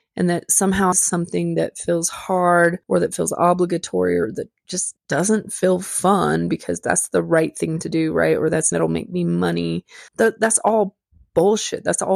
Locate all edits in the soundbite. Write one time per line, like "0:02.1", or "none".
0:00.9
0:02.8
0:05.0
0:08.7
0:10.1